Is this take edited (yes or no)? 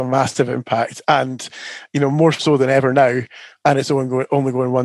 no